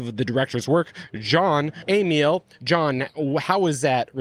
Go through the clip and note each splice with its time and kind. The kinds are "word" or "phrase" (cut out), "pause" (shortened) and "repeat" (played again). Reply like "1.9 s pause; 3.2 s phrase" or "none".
none